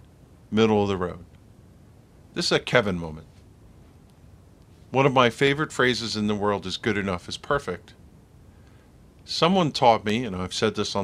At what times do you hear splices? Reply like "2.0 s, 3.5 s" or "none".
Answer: none